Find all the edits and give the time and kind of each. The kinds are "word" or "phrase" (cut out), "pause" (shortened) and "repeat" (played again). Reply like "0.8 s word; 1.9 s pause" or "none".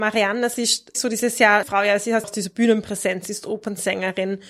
0.9 s word; 1.6 s word; 2.2 s word